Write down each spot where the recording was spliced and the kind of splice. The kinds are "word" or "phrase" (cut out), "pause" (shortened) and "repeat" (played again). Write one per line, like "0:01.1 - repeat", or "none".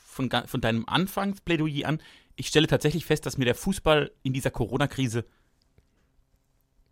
none